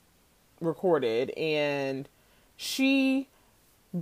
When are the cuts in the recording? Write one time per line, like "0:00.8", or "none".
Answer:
none